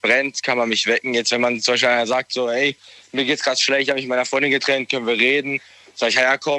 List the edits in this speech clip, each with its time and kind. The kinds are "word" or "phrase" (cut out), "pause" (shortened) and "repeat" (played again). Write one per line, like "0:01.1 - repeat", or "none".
none